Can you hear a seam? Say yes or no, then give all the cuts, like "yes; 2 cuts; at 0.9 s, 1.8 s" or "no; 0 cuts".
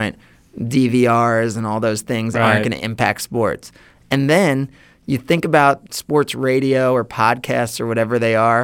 no; 0 cuts